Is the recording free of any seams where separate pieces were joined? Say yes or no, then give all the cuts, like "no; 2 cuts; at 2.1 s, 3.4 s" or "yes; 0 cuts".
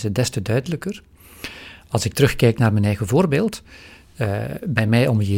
yes; 0 cuts